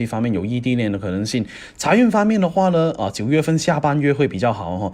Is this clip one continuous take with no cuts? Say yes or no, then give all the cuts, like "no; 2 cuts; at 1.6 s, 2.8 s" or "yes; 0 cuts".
yes; 0 cuts